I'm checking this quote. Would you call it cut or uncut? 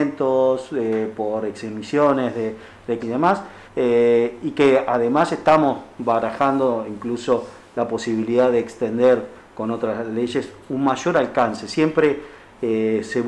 cut